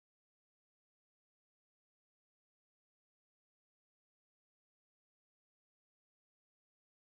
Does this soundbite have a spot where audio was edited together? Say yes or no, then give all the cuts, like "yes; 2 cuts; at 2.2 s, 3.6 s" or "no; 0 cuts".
no; 0 cuts